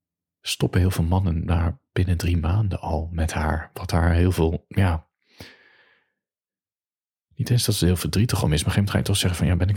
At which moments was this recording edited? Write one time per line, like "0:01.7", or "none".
none